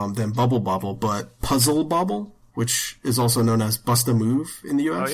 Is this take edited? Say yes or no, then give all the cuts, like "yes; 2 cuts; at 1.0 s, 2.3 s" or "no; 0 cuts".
no; 0 cuts